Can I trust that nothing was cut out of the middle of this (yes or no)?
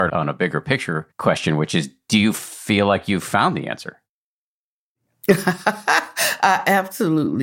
yes